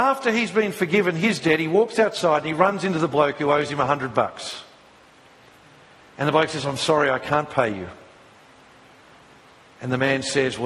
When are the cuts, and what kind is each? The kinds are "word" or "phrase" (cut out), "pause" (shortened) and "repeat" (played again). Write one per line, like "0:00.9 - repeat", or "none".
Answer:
none